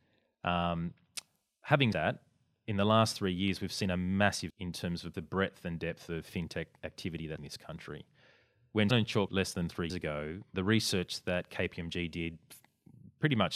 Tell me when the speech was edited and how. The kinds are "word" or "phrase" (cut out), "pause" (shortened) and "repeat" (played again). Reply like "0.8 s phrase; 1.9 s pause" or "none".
1.9 s word; 4.5 s word; 5.1 s word; 7.4 s word; 8.9 s word; 9.3 s word; 9.9 s word; 10.5 s word